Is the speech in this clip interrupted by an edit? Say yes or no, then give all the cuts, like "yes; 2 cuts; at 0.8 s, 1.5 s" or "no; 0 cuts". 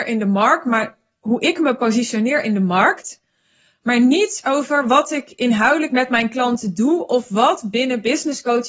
no; 0 cuts